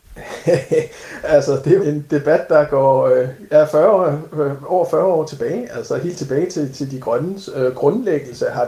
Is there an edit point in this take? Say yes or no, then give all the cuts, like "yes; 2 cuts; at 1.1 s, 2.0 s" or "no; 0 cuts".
yes; 1 cut; at 1.8 s